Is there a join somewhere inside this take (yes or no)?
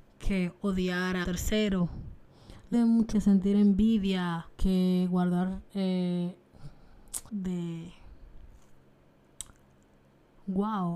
yes